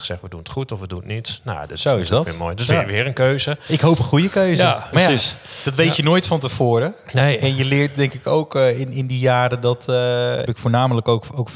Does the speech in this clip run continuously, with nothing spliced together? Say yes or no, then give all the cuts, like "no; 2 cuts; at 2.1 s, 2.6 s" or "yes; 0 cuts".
no; 1 cut; at 10.5 s